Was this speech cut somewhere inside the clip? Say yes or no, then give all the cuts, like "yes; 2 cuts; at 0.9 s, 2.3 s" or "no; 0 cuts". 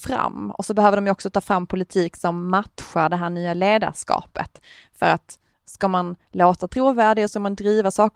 no; 0 cuts